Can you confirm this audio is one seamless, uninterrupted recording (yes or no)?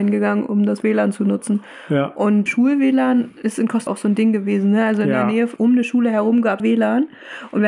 no